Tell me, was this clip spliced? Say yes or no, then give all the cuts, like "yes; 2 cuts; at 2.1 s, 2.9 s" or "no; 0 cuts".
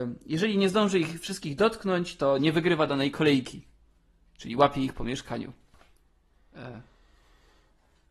no; 0 cuts